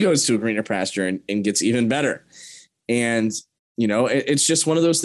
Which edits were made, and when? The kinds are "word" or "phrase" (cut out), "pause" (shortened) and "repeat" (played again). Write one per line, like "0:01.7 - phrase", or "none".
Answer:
none